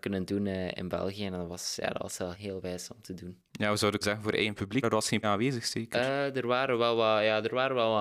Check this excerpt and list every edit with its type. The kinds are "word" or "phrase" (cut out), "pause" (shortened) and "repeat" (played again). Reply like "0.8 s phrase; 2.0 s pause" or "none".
2.3 s word; 4.0 s word; 4.8 s word; 5.2 s phrase